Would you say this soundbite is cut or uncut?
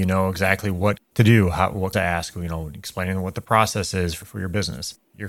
cut